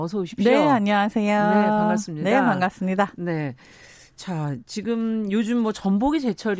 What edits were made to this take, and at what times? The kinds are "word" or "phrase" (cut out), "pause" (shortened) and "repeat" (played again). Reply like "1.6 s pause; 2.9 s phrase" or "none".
none